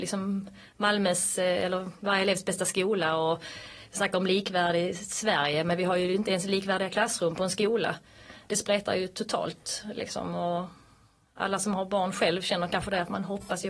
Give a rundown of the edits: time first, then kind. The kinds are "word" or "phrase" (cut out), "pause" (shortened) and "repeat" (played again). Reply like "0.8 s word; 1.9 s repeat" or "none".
none